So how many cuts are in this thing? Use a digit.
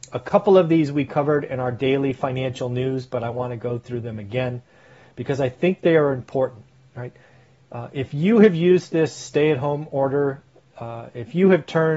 0